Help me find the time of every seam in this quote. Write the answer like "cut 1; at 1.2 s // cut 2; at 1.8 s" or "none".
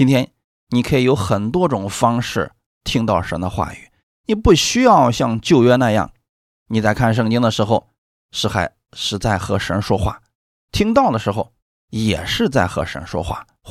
none